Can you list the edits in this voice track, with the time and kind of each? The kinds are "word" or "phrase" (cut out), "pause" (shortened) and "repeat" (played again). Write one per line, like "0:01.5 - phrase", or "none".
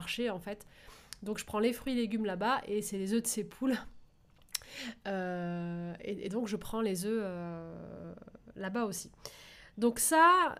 none